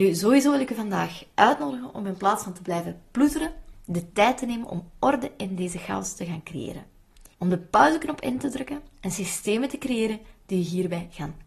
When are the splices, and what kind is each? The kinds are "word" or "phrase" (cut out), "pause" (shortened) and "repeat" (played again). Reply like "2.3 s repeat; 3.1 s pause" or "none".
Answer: 7.3 s pause